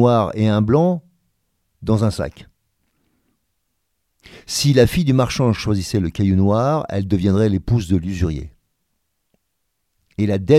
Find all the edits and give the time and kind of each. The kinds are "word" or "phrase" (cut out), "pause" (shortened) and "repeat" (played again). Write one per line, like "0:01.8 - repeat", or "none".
none